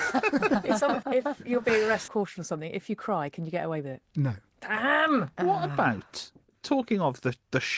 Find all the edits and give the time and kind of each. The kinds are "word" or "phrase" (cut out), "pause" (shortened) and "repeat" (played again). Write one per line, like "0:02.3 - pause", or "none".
0:01.0 - word
0:02.1 - word
0:06.4 - pause